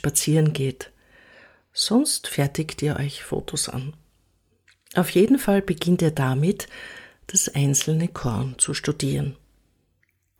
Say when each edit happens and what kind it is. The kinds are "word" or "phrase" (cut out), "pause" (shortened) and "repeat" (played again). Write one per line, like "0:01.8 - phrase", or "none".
none